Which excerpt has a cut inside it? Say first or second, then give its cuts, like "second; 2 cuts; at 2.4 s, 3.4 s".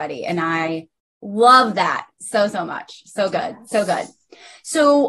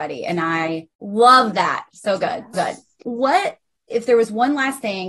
second; 4 cuts; at 0.9 s, 1.9 s, 2.5 s, 3.0 s